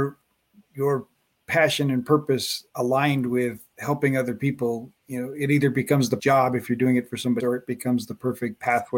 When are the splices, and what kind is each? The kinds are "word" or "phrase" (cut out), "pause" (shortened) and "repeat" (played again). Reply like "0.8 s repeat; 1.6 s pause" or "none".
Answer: 2.7 s pause; 5.0 s pause; 6.2 s word; 7.4 s word